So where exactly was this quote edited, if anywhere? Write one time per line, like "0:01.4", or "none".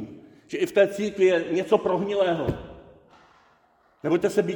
none